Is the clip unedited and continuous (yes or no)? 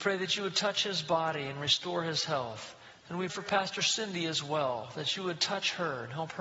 no